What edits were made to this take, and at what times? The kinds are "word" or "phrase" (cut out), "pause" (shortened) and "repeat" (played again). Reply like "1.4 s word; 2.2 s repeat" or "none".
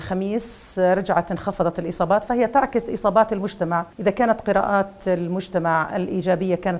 3.9 s pause

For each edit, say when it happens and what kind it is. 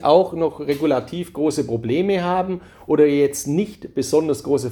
none

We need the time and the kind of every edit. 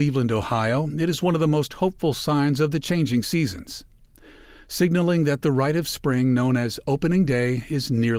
none

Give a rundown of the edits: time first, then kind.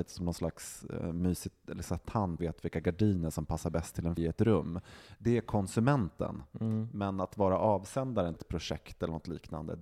2.4 s word; 4.2 s word; 8.4 s word

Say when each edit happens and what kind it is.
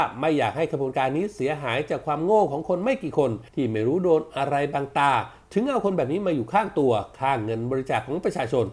3.5 s pause

